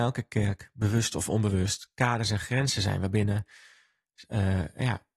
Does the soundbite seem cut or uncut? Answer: uncut